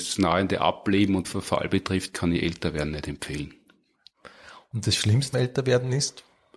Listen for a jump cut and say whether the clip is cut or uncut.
cut